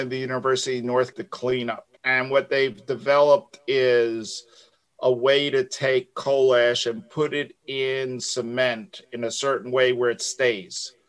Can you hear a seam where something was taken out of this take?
yes; 2 cuts; at 1.1 s, 2.0 s

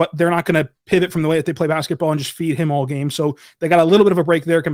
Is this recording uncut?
yes; 0 cuts

